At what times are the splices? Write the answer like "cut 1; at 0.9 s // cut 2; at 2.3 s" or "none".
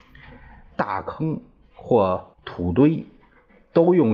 cut 1; at 2.3 s